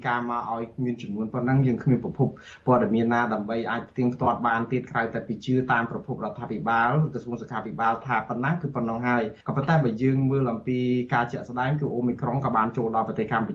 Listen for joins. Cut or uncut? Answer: cut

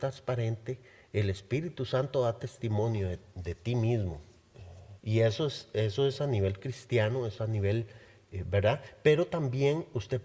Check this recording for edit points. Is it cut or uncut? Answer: cut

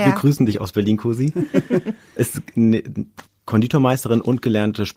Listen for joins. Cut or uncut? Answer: cut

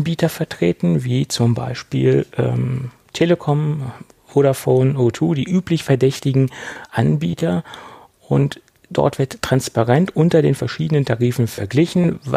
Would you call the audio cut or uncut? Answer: uncut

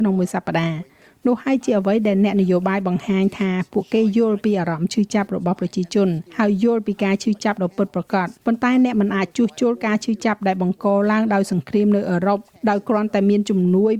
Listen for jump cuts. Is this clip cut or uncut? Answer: cut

